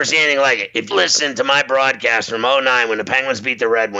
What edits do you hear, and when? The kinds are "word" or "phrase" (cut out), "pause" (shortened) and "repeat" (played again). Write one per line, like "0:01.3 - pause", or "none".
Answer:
0:00.9 - word